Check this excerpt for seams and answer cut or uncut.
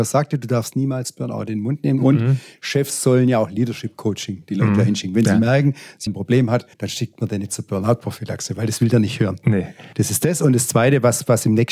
cut